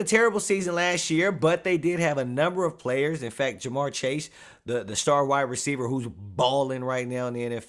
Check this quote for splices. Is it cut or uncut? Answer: uncut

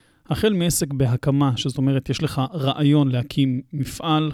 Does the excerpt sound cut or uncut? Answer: uncut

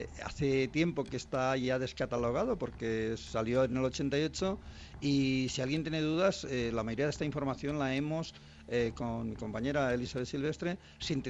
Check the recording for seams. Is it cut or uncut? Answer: uncut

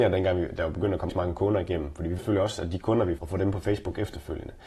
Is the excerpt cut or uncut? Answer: cut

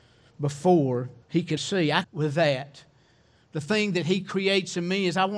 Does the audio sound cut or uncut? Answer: cut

